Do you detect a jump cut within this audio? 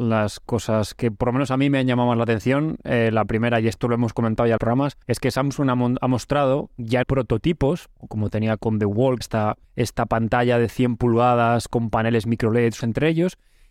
yes; 8 cuts; at 4.6 s, 5.0 s, 7.0 s, 8.0 s, 8.6 s, 9.2 s, 9.6 s, 12.8 s

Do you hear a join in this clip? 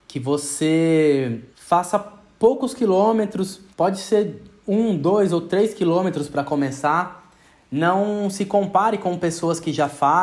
yes; 2 cuts; at 1.5 s, 3.7 s

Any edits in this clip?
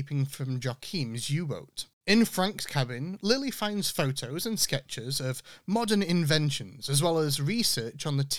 no; 0 cuts

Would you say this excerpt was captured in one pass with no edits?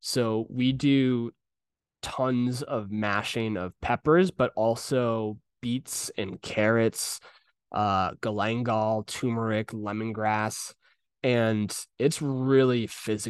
yes; 0 cuts

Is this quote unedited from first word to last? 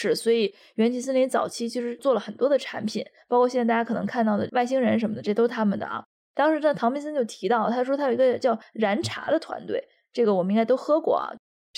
yes; 0 cuts

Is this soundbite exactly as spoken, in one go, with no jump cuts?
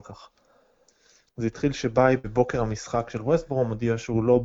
yes; 0 cuts

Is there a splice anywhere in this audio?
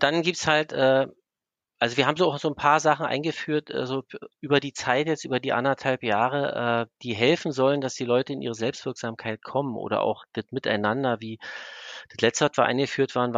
no; 0 cuts

